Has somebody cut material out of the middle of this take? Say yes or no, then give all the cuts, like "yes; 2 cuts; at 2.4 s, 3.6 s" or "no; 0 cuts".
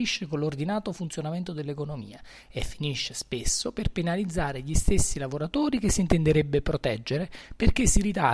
no; 0 cuts